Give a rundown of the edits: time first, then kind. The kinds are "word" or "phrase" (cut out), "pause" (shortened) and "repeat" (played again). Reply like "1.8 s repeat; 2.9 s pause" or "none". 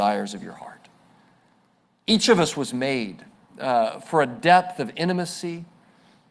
none